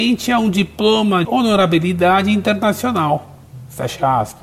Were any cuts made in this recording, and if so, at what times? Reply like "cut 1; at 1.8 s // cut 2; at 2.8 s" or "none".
cut 1; at 1.2 s